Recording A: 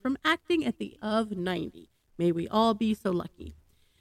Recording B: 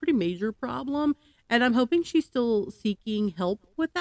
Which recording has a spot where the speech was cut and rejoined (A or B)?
A